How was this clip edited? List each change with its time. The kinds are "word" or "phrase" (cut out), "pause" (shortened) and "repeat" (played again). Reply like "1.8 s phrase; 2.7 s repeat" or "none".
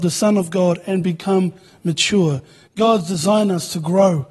none

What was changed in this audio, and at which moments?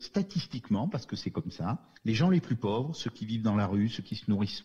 2.0 s pause

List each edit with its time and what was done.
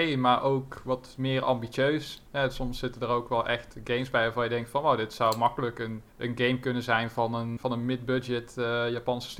2.3 s pause; 6.1 s pause; 7.6 s word

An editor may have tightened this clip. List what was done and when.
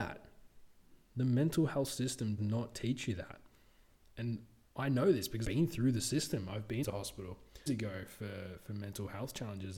2.4 s word; 5.4 s word; 6.8 s word; 7.7 s word

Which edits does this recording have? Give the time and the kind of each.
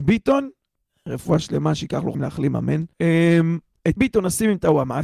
2.1 s word; 2.9 s pause; 4.0 s word

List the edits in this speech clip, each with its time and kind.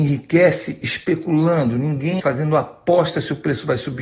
2.2 s word

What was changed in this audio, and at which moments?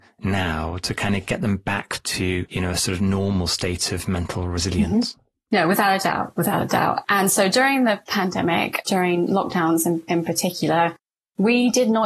none

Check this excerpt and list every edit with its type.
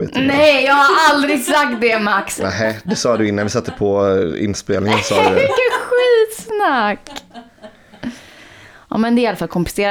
none

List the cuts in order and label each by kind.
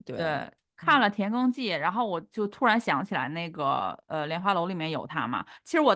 none

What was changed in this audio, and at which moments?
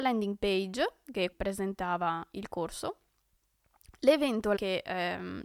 1.3 s word; 4.6 s word

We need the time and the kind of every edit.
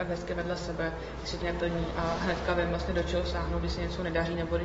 1.4 s word

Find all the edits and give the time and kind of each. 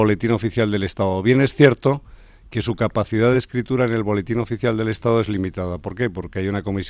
none

